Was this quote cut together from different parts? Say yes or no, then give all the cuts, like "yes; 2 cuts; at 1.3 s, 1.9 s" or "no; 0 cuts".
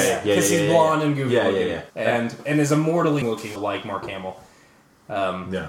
yes; 3 cuts; at 1.9 s, 3.2 s, 3.6 s